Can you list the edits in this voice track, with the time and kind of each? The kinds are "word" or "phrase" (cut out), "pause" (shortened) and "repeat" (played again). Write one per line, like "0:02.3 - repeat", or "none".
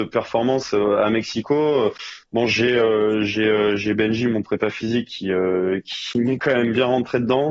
none